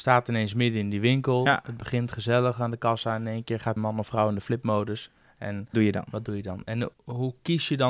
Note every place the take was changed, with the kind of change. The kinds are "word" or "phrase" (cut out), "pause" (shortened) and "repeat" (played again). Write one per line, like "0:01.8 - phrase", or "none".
0:03.8 - word
0:05.7 - word
0:06.9 - word